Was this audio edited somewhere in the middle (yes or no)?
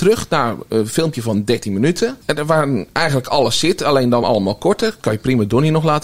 no